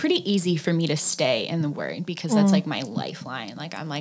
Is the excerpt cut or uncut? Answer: uncut